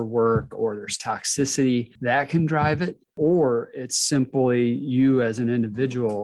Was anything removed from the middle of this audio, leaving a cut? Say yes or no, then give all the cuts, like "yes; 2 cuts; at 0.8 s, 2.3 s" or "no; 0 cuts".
no; 0 cuts